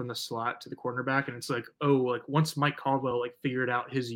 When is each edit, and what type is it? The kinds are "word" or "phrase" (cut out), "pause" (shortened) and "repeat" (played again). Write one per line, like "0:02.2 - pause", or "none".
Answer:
none